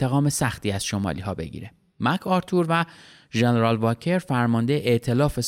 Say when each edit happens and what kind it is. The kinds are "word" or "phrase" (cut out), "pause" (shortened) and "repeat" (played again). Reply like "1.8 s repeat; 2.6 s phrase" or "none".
none